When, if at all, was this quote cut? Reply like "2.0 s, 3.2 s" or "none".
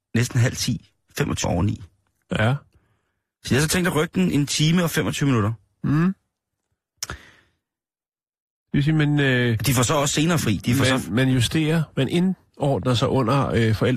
1.4 s